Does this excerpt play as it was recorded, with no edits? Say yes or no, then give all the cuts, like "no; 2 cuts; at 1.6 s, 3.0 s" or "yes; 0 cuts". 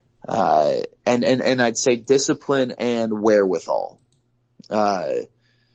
yes; 0 cuts